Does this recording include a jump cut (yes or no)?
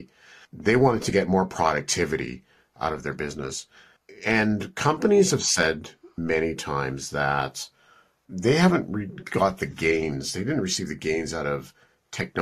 no